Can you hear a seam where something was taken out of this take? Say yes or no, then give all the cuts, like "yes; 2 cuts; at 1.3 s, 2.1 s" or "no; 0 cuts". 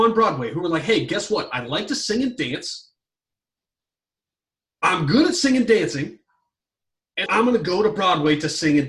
yes; 1 cut; at 7.3 s